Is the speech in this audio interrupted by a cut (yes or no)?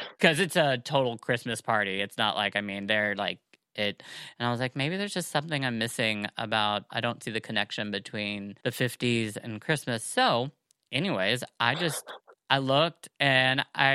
yes